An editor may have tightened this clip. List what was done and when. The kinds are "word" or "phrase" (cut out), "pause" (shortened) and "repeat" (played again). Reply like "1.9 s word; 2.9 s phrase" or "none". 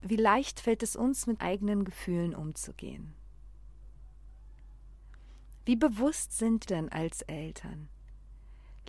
1.4 s word; 6.7 s word